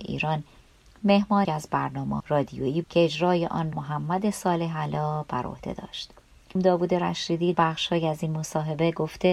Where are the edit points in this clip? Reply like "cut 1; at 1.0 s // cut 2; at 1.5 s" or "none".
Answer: cut 1; at 1.4 s // cut 2; at 2.2 s // cut 3; at 2.8 s // cut 4; at 3.7 s // cut 5; at 6.6 s // cut 6; at 7.5 s